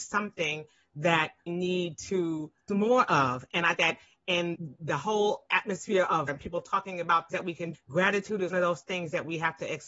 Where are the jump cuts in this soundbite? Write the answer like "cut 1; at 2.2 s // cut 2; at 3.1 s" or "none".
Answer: cut 1; at 1.5 s // cut 2; at 2.7 s // cut 3; at 3.8 s // cut 4; at 4.5 s // cut 5; at 6.3 s // cut 6; at 7.3 s // cut 7; at 7.7 s // cut 8; at 8.5 s